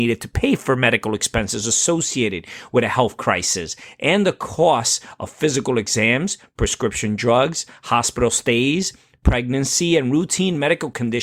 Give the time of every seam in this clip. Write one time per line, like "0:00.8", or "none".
none